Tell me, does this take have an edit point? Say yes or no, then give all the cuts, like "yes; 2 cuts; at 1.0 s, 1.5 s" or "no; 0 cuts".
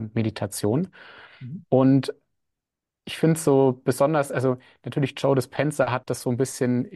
no; 0 cuts